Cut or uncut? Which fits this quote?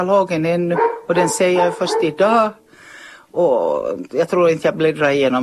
uncut